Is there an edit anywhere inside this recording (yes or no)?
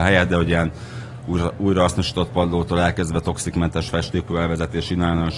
yes